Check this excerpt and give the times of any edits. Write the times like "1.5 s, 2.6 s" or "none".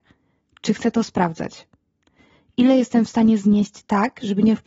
none